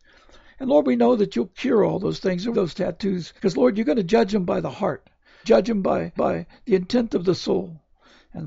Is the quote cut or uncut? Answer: cut